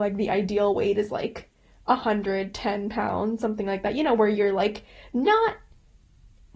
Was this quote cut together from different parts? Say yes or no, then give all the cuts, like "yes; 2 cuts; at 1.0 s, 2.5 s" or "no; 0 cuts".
no; 0 cuts